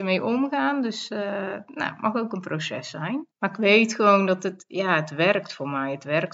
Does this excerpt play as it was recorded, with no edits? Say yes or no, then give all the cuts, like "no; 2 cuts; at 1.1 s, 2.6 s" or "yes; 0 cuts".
no; 1 cut; at 3.3 s